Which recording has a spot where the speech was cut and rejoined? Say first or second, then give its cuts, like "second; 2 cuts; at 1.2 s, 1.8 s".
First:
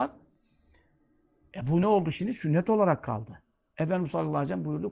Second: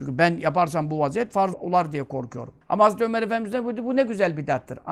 second; 2 cuts; at 1.5 s, 2.6 s